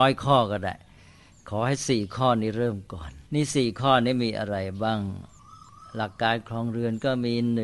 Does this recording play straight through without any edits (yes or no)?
no